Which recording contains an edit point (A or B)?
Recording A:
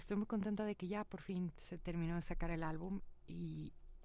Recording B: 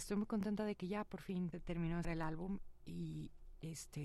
B